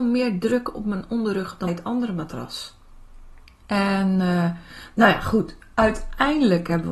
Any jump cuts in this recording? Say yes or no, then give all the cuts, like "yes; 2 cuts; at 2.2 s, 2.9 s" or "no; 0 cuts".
yes; 2 cuts; at 1.7 s, 3.4 s